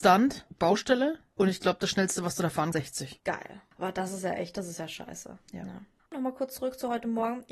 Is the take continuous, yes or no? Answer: no